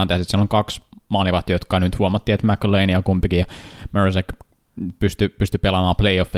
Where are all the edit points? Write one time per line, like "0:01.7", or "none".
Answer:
none